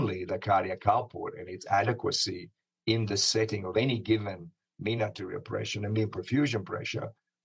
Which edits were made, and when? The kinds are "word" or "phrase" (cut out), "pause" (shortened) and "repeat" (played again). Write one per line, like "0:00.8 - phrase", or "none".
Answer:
none